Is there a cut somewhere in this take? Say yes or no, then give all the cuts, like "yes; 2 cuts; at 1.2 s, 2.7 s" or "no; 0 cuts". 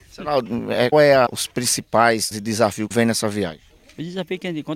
yes; 4 cuts; at 0.9 s, 1.3 s, 2.3 s, 2.9 s